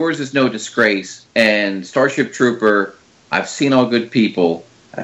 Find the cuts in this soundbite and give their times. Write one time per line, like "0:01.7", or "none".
0:01.3